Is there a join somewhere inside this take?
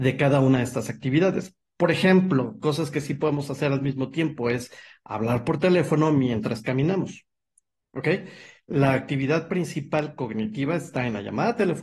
no; 0 cuts

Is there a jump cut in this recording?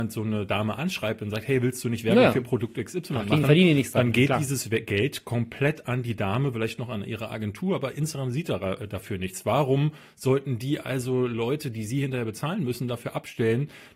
no; 0 cuts

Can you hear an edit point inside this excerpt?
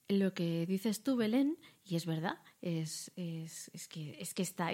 no; 0 cuts

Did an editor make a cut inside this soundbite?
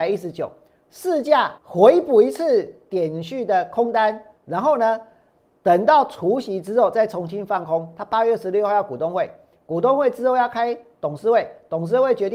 yes; 1 cut; at 1.6 s

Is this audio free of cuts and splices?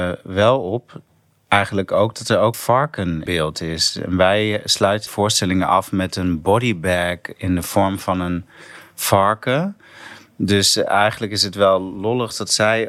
no; 3 cuts; at 2.5 s, 3.3 s, 5.1 s

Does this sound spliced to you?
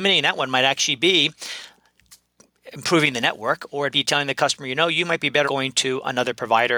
yes; 2 cuts; at 3.9 s, 5.4 s

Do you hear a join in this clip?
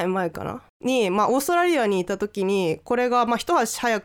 no; 0 cuts

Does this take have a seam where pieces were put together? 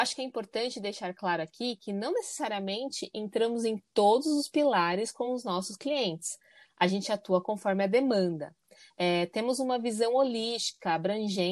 no; 0 cuts

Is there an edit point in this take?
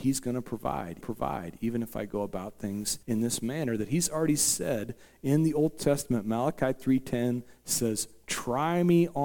yes; 2 cuts; at 1.0 s, 3.0 s

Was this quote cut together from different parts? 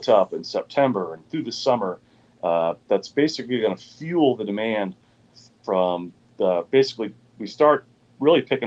no; 0 cuts

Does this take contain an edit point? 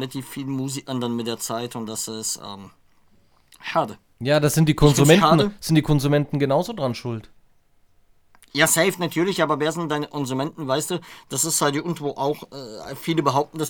no; 0 cuts

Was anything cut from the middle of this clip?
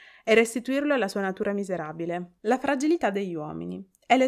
yes; 1 cut; at 2.4 s

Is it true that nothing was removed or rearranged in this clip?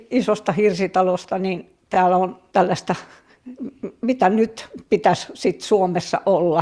no; 1 cut; at 2.5 s

